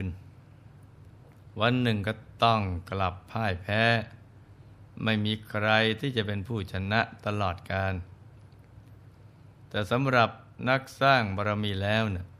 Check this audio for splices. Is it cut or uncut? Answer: uncut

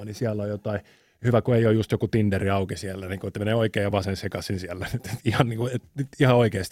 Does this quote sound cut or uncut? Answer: uncut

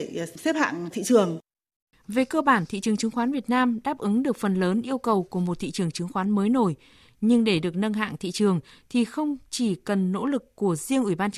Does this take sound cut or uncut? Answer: uncut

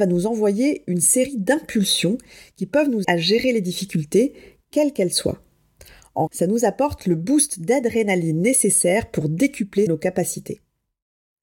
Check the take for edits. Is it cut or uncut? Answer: cut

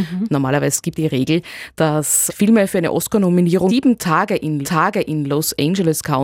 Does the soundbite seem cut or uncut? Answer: cut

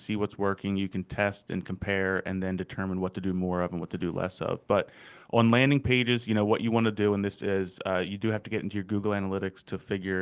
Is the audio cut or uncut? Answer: uncut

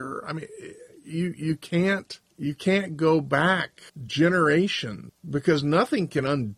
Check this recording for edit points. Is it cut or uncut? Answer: uncut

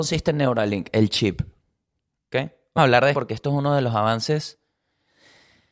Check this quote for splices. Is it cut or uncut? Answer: cut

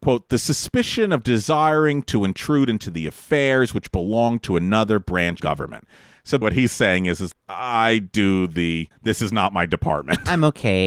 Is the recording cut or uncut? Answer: cut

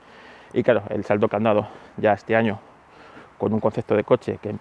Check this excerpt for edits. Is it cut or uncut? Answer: uncut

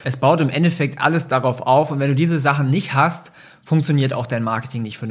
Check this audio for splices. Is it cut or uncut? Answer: uncut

